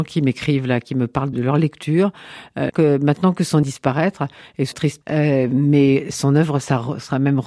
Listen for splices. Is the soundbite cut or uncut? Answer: cut